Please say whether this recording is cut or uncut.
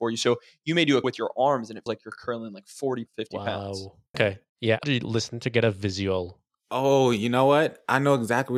cut